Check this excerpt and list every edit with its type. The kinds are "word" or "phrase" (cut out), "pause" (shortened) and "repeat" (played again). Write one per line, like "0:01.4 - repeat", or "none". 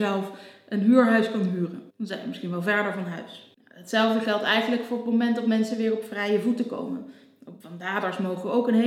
0:01.9 - pause
0:07.6 - pause

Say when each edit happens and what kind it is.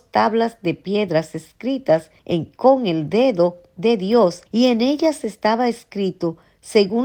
0:02.2 - pause
0:04.5 - pause

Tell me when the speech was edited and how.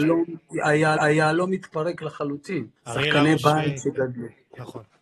0:01.0 - repeat
0:02.8 - pause

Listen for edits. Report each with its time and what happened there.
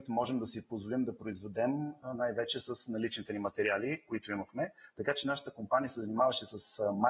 none

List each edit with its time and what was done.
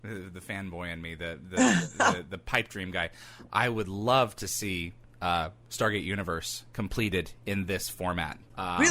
none

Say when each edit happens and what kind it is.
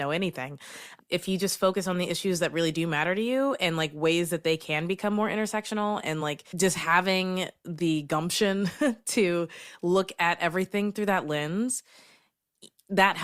none

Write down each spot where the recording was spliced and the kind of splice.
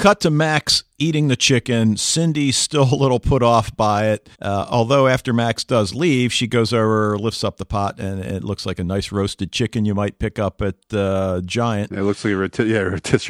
0:04.3 - pause

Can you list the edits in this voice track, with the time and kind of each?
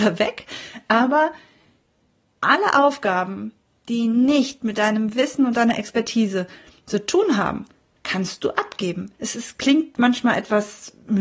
0:09.1 - pause

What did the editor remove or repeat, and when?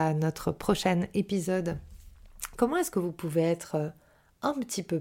none

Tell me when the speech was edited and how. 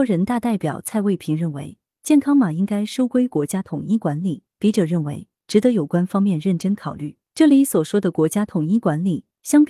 0:07.2 - pause

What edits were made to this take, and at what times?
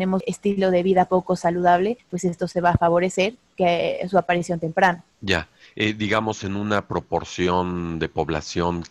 none

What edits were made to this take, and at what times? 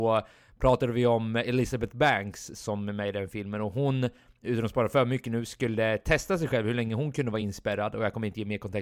none

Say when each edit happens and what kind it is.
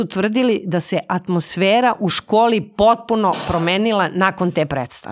none

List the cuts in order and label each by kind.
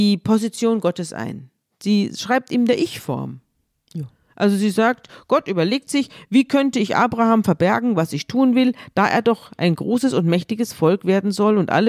none

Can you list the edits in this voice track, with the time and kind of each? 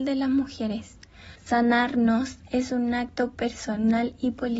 0:01.4 - pause

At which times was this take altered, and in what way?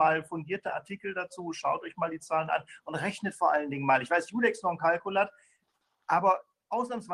none

